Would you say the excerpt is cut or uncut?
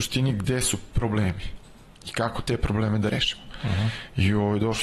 uncut